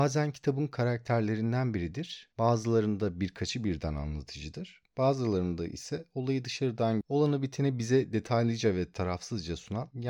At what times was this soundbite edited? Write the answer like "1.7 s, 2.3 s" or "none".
7.0 s